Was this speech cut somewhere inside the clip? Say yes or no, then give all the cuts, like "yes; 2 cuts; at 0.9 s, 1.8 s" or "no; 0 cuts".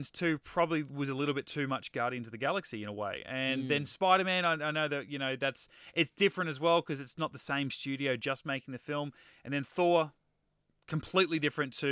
no; 0 cuts